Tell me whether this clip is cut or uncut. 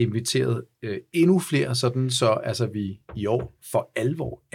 uncut